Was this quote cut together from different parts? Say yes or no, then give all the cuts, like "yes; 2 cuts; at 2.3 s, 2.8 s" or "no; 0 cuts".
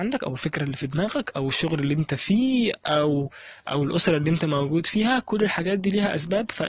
no; 0 cuts